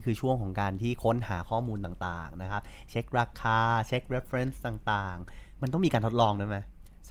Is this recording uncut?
yes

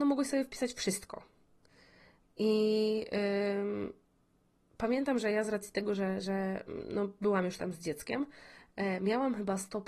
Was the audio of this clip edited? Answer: no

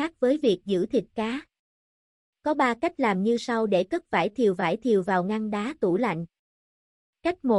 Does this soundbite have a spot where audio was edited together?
no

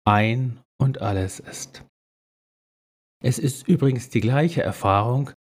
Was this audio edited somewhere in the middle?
no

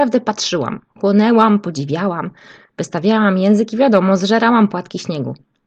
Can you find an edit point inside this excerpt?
no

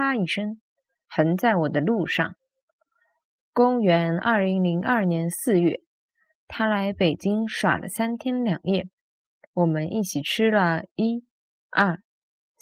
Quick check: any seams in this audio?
no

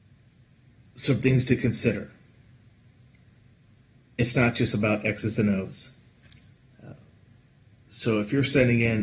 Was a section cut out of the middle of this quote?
no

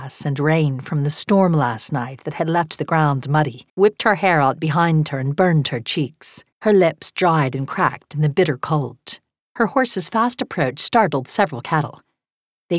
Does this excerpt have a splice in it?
yes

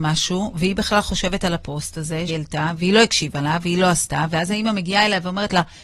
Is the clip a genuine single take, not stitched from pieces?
no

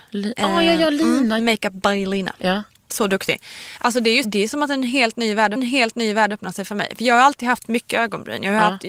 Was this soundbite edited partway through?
yes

